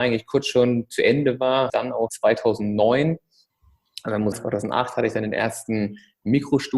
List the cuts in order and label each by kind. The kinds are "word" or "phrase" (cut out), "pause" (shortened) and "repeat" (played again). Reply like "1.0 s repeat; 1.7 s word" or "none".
1.7 s phrase; 2.1 s word; 4.3 s word